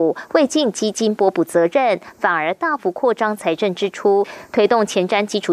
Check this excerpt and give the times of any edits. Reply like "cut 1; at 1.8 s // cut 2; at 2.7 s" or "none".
none